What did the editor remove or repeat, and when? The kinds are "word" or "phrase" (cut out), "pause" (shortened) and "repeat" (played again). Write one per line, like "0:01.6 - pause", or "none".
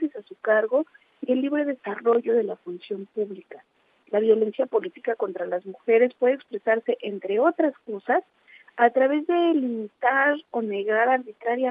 none